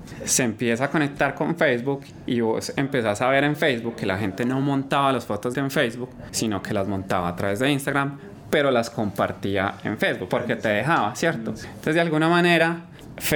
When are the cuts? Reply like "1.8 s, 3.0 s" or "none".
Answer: 5.5 s, 10.3 s